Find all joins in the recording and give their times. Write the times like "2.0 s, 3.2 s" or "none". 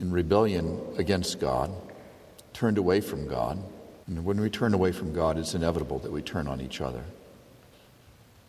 4.0 s